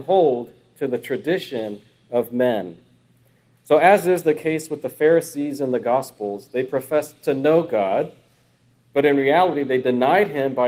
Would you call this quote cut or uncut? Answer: uncut